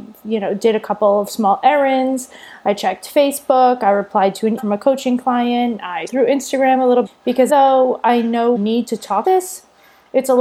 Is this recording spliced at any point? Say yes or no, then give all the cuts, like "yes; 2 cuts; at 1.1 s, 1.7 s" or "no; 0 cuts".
yes; 6 cuts; at 4.6 s, 6.1 s, 7.1 s, 7.5 s, 8.6 s, 9.2 s